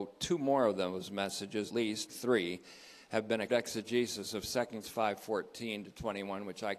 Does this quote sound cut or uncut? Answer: cut